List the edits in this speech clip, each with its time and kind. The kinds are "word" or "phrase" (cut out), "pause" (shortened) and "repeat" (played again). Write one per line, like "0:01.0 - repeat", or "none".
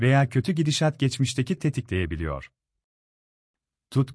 0:01.6 - word